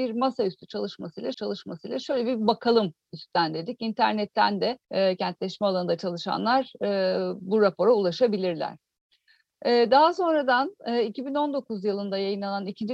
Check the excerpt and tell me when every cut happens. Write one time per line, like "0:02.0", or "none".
0:01.3
0:04.8
0:07.4

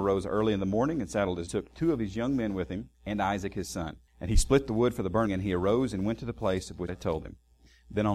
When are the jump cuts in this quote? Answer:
0:01.5
0:02.9
0:04.1
0:05.2
0:06.9

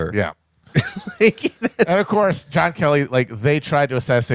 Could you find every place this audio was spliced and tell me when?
none

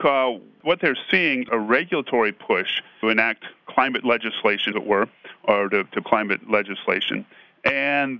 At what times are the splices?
0:01.5
0:03.0
0:04.7
0:06.0

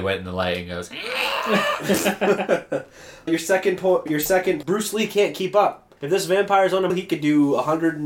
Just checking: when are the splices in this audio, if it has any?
0:03.3
0:04.1
0:04.6
0:06.0
0:06.9

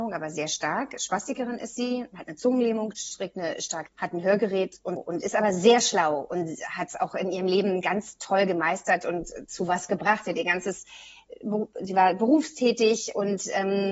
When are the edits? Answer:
0:03.9
0:05.0

